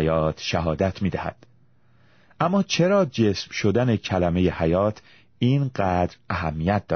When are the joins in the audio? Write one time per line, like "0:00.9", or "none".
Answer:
none